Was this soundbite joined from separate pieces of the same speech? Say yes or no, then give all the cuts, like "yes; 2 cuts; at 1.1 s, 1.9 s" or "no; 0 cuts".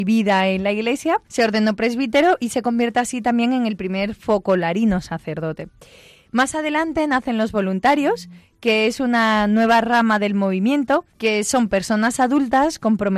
yes; 2 cuts; at 1.3 s, 11.1 s